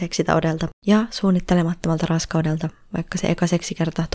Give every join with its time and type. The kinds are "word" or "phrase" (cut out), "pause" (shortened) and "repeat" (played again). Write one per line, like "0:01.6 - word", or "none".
none